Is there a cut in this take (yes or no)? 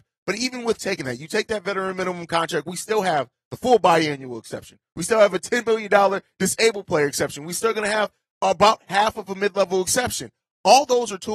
no